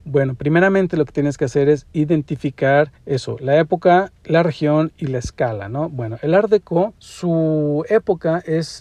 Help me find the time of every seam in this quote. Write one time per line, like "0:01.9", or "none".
0:03.0
0:07.0